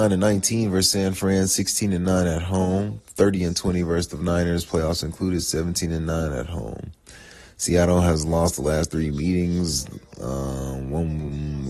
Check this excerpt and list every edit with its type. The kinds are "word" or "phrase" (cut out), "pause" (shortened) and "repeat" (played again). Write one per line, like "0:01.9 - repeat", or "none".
none